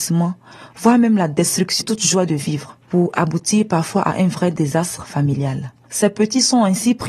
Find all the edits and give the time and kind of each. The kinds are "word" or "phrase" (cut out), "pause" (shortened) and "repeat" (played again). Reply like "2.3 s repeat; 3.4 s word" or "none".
1.8 s word